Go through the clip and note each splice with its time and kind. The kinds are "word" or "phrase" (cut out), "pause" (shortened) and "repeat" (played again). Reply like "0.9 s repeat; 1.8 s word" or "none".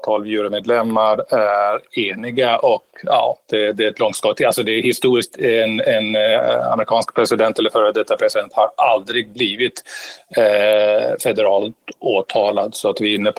none